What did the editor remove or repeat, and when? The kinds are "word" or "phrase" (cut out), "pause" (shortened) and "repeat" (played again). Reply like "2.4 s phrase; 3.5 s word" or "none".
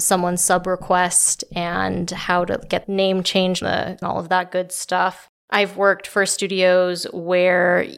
2.8 s word; 3.6 s word; 4.0 s phrase; 5.4 s pause